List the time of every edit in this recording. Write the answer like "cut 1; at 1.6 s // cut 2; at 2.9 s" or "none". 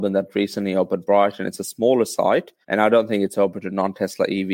cut 1; at 2.6 s